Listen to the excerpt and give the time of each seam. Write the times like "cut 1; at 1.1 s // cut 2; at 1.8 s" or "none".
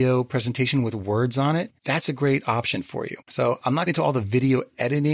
cut 1; at 1.8 s // cut 2; at 3.2 s // cut 3; at 3.9 s